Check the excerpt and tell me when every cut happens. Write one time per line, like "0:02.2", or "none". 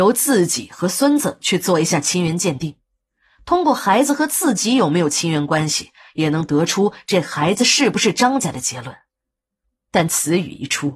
none